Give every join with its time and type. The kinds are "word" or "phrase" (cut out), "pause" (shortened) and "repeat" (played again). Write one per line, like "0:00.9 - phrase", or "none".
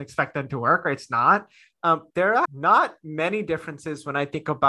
0:02.1 - word
0:02.4 - word